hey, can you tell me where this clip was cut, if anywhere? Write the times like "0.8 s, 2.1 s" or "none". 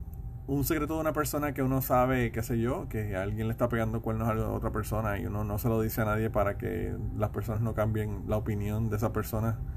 none